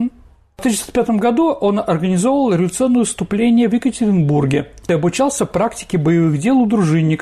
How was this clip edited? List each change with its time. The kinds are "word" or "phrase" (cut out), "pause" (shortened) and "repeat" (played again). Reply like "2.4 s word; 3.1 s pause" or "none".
none